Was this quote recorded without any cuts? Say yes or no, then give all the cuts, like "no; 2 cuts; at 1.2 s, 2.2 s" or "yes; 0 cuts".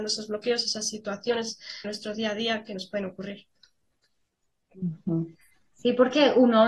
no; 1 cut; at 1.8 s